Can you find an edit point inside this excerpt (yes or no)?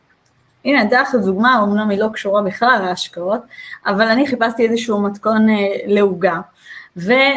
no